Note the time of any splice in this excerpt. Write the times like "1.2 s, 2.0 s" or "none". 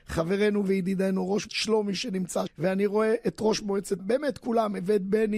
1.5 s, 2.5 s, 4.0 s